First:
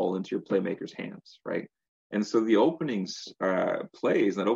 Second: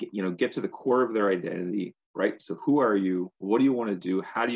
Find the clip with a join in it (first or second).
second